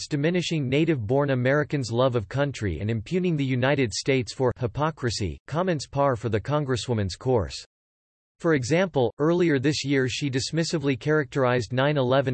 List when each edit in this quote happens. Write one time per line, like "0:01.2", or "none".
none

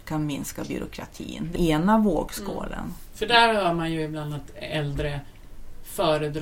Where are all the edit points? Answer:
0:01.6

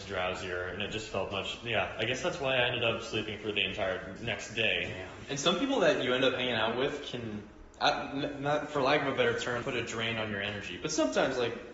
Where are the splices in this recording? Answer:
0:01.3
0:04.2
0:09.6

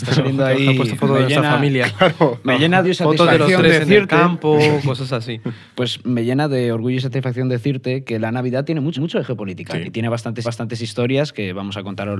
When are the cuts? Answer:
0:02.8
0:09.0
0:10.4

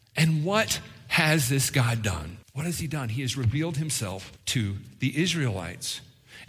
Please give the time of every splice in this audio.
0:02.4
0:04.4

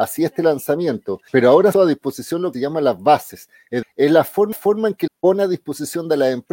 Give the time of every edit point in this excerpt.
0:01.3
0:01.7
0:02.5
0:03.8
0:04.5
0:05.1

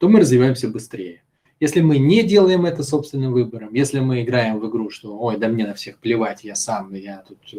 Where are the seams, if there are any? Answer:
none

